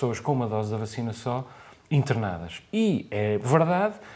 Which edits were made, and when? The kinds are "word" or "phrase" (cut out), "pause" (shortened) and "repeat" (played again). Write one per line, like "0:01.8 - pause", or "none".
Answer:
none